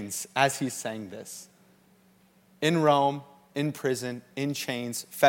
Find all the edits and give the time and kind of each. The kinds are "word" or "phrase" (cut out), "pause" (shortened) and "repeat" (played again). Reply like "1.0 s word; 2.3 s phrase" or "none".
none